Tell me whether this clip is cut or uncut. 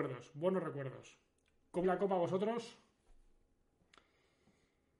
cut